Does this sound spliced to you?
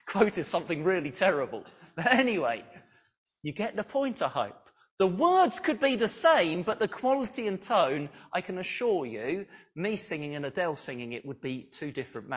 no; 0 cuts

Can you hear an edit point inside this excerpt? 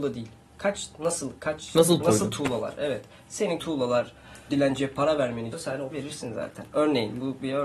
yes; 5 cuts; at 2.0 s, 3.6 s, 4.5 s, 5.5 s, 5.9 s

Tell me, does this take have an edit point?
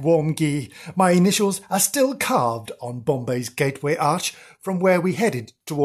no; 0 cuts

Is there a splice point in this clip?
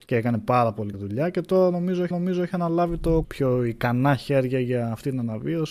yes; 3 cuts; at 0.9 s, 2.1 s, 3.2 s

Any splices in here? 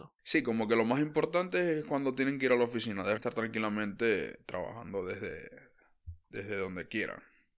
yes; 2 cuts; at 3.2 s, 6.2 s

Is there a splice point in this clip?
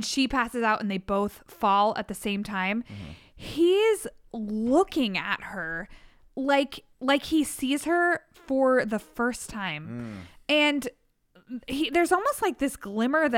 yes; 1 cut; at 6.9 s

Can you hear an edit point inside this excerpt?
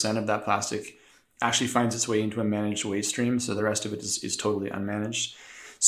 no; 0 cuts

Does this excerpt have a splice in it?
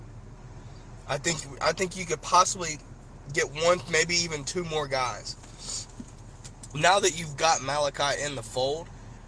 no; 0 cuts

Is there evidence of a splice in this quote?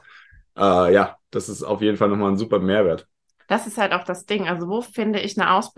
no; 0 cuts

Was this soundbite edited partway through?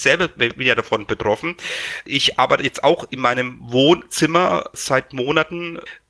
no; 0 cuts

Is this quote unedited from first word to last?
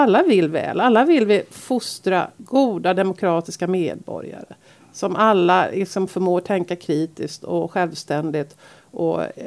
yes; 0 cuts

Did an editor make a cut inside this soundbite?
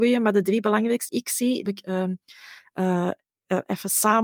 yes; 2 cuts; at 1.1 s, 1.7 s

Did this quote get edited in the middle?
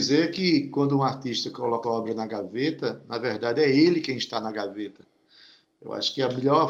yes; 1 cut; at 1.8 s

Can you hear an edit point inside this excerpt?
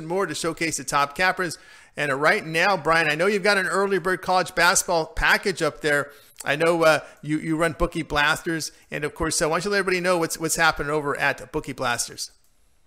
no; 0 cuts

